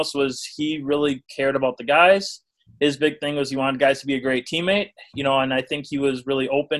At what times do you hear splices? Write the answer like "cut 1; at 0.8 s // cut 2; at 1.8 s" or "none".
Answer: none